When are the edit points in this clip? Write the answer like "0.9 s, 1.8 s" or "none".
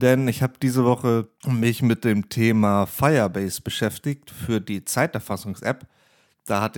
1.4 s

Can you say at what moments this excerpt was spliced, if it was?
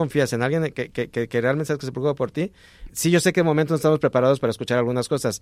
2.9 s

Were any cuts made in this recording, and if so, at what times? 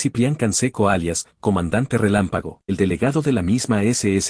2.7 s

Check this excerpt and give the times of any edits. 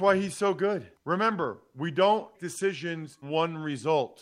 0.9 s, 2.3 s, 3.2 s

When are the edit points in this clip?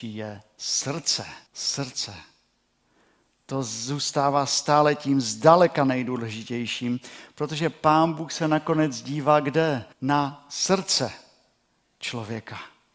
1.5 s, 9.9 s

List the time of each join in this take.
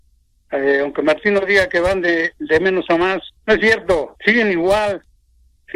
3.4 s

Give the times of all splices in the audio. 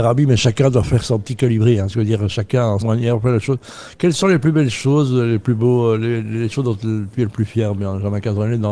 2.8 s

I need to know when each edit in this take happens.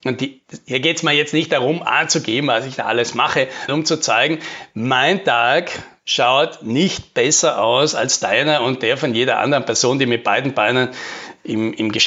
3.7 s

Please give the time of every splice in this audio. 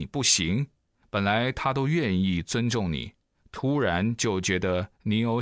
none

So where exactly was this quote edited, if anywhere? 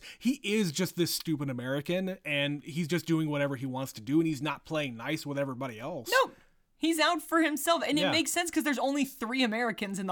none

